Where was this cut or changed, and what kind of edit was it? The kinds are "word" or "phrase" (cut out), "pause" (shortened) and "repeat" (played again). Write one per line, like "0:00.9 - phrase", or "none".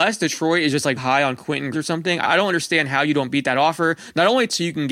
0:01.0 - word
0:01.7 - word
0:02.2 - word